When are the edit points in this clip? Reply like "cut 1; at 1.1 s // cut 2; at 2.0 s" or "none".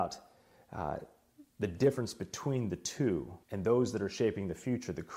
cut 1; at 1.5 s // cut 2; at 3.4 s